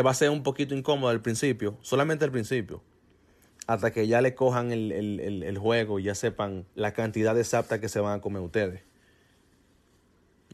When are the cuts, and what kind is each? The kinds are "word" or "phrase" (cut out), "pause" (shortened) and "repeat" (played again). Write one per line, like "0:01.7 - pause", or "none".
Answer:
0:06.7 - pause

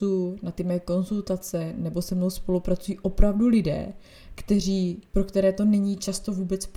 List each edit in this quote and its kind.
0:05.1 - pause

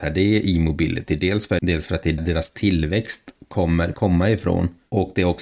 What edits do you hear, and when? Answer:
0:01.6 - word
0:02.2 - word
0:03.9 - word

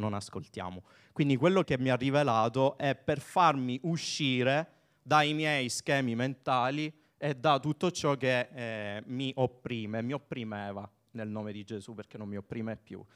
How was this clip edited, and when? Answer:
0:01.6 - word

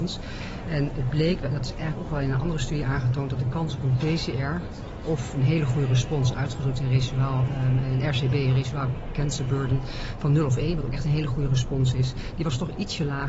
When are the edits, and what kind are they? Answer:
0:01.4 - word

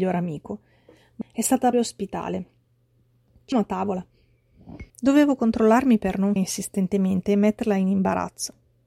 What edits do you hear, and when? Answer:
0:01.2 - word
0:01.7 - word
0:03.5 - word
0:04.9 - pause
0:06.4 - word

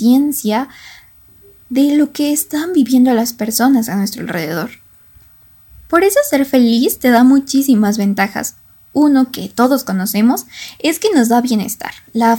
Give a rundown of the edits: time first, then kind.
none

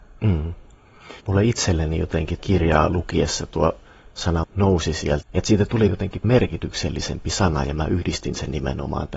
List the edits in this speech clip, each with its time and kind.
0:01.2 - pause
0:02.4 - word
0:04.4 - word
0:05.2 - phrase
0:05.9 - word
0:06.2 - word

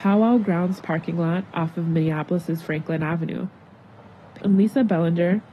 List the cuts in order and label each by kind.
0:04.4 - word

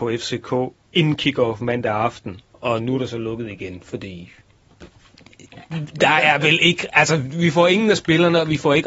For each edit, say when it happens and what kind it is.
0:02.4 - pause

